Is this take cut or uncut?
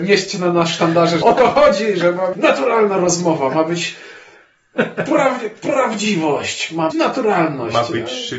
cut